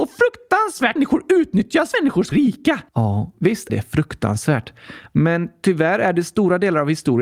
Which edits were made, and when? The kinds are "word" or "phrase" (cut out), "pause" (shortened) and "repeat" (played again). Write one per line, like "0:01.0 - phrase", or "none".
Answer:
0:01.0 - phrase
0:01.9 - phrase
0:02.3 - word
0:02.9 - pause
0:03.7 - word